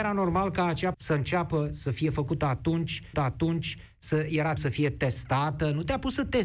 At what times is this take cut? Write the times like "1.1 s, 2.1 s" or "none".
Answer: 0.9 s, 3.1 s, 4.6 s